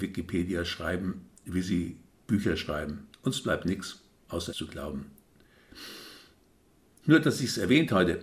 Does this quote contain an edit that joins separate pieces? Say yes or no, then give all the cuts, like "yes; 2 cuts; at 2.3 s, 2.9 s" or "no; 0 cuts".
yes; 3 cuts; at 1.4 s, 3.1 s, 4.5 s